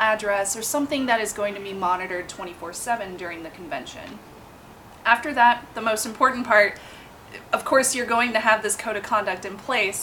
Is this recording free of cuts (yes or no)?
yes